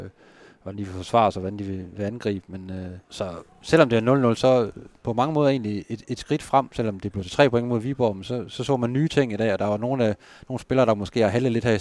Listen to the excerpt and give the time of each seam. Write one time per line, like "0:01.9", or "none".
0:03.0